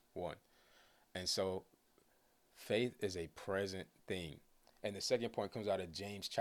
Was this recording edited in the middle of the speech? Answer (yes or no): no